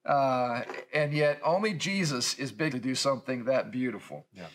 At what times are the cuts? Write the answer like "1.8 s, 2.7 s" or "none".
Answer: 2.7 s